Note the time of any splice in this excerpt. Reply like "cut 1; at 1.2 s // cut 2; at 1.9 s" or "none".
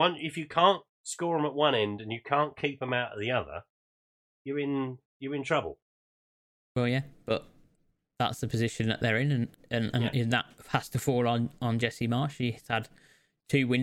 none